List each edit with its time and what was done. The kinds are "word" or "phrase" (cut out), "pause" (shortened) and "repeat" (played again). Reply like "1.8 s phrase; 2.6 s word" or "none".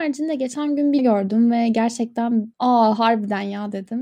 1.0 s word